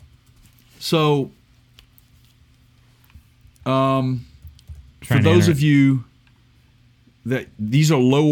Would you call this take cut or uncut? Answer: uncut